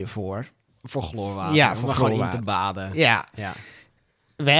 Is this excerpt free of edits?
yes; 0 cuts

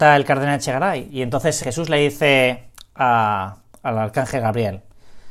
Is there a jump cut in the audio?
yes; 1 cut; at 1.6 s

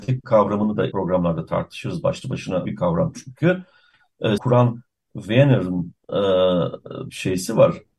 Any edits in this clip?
yes; 4 cuts; at 0.9 s, 2.7 s, 4.4 s, 7.1 s

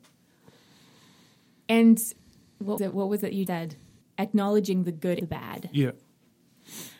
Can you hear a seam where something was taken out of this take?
yes; 4 cuts; at 2.8 s, 3.5 s, 4.0 s, 5.2 s

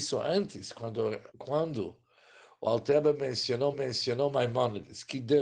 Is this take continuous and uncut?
no; 2 cuts; at 1.3 s, 3.7 s

